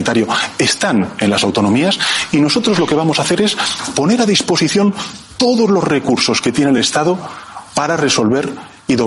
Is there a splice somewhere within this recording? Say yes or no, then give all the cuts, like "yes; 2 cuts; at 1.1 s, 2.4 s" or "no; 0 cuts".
no; 0 cuts